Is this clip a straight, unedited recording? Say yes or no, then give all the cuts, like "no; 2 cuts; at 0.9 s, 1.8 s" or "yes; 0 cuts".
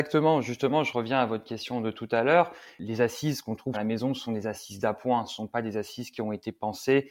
no; 1 cut; at 3.7 s